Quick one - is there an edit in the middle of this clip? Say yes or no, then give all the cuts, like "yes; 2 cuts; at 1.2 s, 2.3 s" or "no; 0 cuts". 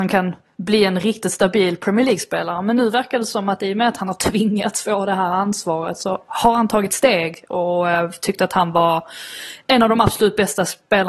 no; 0 cuts